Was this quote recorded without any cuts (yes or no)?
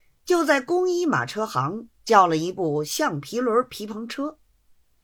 no